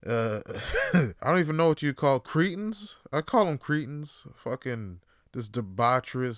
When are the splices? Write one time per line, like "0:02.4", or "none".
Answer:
0:01.2
0:05.1